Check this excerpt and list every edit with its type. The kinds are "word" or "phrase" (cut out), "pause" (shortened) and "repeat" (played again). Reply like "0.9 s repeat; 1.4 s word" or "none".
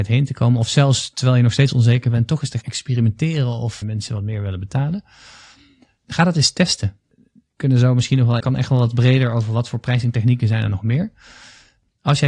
2.6 s word; 3.8 s word; 8.4 s word

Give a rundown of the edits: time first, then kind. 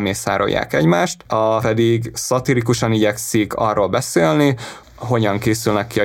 1.6 s word; 4.8 s word

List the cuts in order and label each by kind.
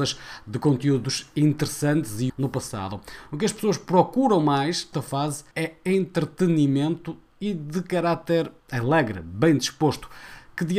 2.3 s phrase; 4.9 s word; 5.5 s pause; 8.6 s pause

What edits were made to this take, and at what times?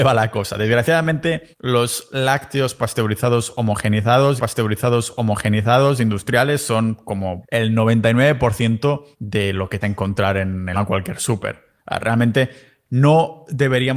1.5 s pause; 4.4 s repeat; 7.4 s word; 9.1 s pause; 9.8 s phrase; 10.7 s word; 11.8 s pause

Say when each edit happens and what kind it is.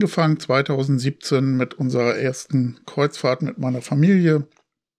none

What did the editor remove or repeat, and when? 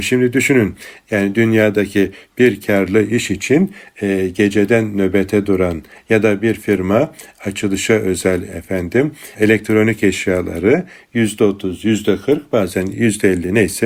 6.0 s word

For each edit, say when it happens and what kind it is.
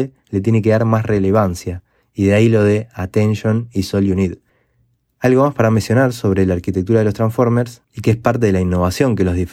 none

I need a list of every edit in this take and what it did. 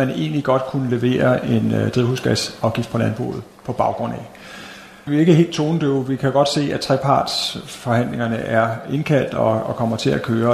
none

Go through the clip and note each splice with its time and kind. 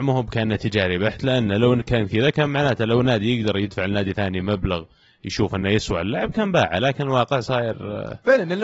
none

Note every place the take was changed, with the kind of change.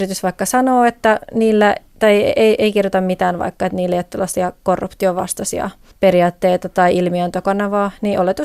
1.9 s pause; 5.9 s pause

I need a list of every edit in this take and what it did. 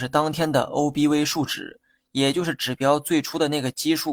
none

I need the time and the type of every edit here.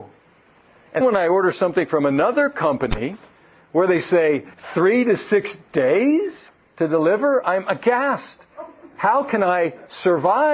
1.0 s word; 4.5 s pause; 6.5 s pause; 7.4 s word

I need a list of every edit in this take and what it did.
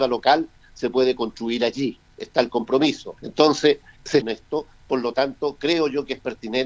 3.2 s pause; 4.2 s phrase

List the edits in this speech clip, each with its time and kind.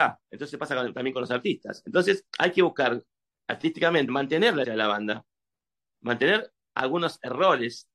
2.3 s pause; 4.1 s phrase; 4.6 s word

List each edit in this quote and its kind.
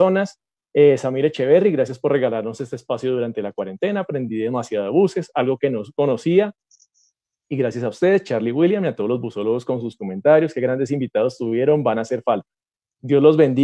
none

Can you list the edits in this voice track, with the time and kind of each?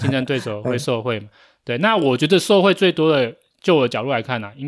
none

